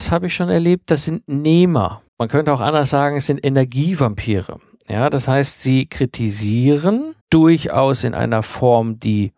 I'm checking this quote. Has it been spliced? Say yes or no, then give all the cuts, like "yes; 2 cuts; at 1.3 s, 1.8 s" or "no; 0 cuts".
yes; 2 cuts; at 2.1 s, 7.2 s